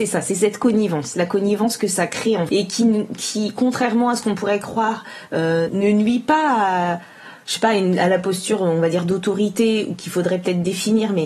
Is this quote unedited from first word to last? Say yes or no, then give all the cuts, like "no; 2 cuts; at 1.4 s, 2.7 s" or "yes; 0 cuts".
no; 2 cuts; at 2.5 s, 5.7 s